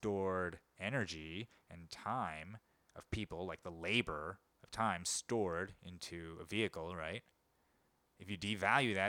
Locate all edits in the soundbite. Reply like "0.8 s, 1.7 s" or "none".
none